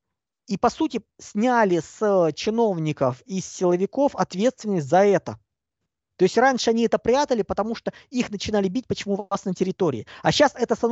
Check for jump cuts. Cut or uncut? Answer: uncut